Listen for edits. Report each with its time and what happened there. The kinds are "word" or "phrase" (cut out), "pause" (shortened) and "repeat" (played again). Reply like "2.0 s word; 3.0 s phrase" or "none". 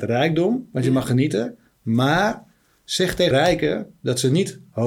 1.0 s word; 3.3 s word